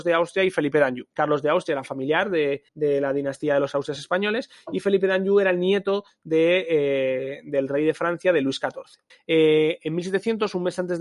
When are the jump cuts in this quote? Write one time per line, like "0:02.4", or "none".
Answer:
0:01.1
0:02.7
0:09.1

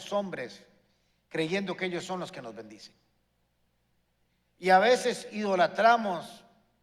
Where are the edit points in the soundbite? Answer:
none

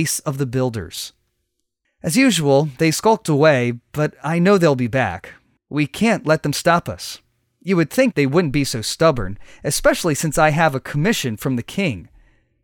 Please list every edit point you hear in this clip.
0:08.1

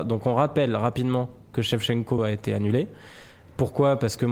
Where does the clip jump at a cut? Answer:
0:02.2

